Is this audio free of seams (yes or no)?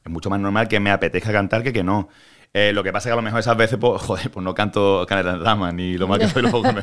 yes